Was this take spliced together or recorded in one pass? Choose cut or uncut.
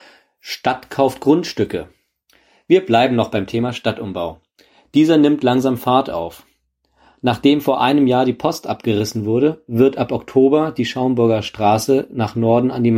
uncut